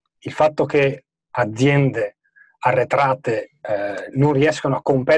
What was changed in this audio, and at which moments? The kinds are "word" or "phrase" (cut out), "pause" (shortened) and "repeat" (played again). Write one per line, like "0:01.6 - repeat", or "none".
0:01.2 - word

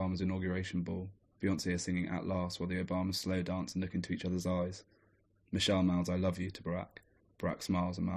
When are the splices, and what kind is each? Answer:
none

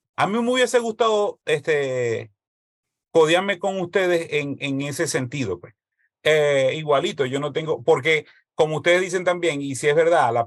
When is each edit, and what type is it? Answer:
none

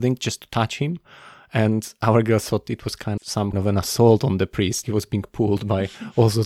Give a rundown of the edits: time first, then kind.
0:03.2 - word
0:03.5 - word
0:04.8 - word

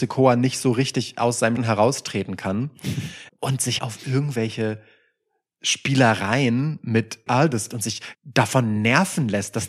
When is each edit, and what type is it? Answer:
0:01.6 - word
0:03.3 - word
0:03.8 - word
0:07.3 - word
0:07.7 - word
0:08.1 - word

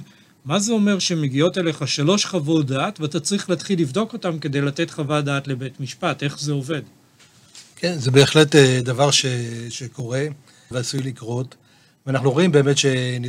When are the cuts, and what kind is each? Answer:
0:10.7 - word

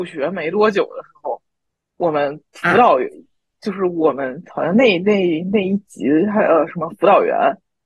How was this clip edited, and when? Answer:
none

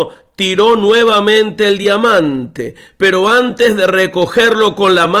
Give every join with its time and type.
none

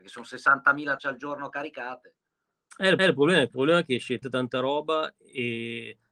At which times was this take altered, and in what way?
0:01.0 - word
0:03.0 - repeat
0:03.5 - phrase
0:04.2 - word

